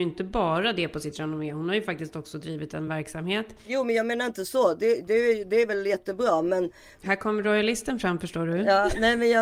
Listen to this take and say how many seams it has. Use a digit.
0